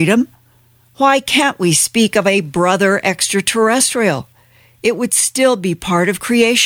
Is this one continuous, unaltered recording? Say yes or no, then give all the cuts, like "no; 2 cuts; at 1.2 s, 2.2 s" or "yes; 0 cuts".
yes; 0 cuts